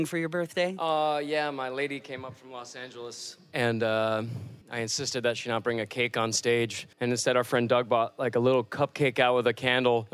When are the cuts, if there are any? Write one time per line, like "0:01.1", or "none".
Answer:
0:04.6
0:06.9